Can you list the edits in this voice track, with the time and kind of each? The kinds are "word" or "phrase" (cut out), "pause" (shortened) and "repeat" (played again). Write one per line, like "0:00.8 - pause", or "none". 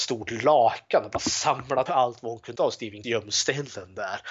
0:01.9 - word
0:02.6 - word
0:03.0 - word

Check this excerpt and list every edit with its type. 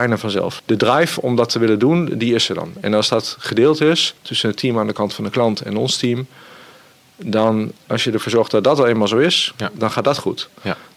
0:04.2 - pause
0:07.8 - pause
0:09.5 - pause

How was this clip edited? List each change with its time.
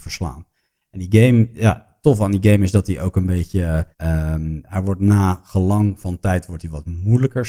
0:03.9 - pause

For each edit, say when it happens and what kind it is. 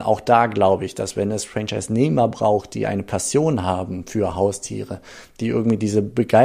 none

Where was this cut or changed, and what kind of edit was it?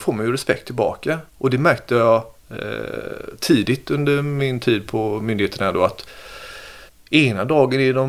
0:01.3 - pause
0:02.4 - pause
0:06.9 - pause

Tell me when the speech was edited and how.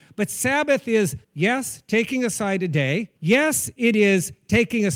0:01.2 - pause
0:03.2 - pause

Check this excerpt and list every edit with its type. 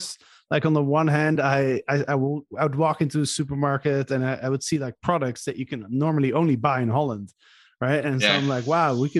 none

